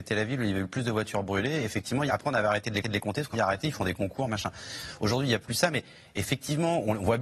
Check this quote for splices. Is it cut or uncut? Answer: cut